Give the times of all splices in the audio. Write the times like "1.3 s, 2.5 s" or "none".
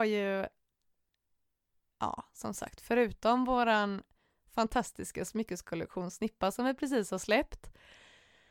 none